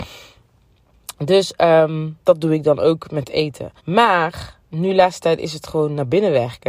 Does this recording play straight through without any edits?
no; 2 cuts; at 2.2 s, 3.8 s

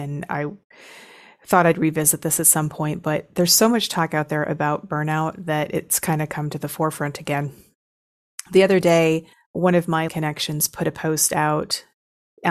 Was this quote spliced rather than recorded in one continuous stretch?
yes; 2 cuts; at 9.3 s, 10.1 s

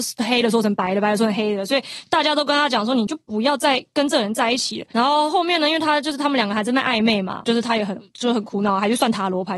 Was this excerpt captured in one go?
no; 2 cuts; at 4.9 s, 7.4 s

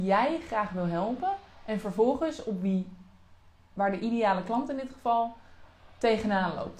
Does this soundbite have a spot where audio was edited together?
no; 0 cuts

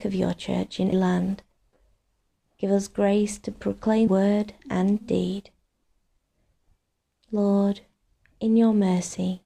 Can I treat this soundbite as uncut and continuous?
no; 2 cuts; at 0.9 s, 4.1 s

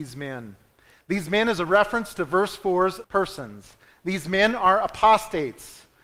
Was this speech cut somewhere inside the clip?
yes; 1 cut; at 3.0 s

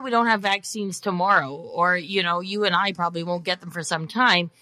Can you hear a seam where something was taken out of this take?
no; 0 cuts

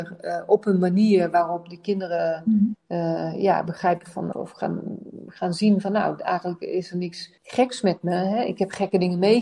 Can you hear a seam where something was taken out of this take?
yes; 2 cuts; at 4.3 s, 7.4 s

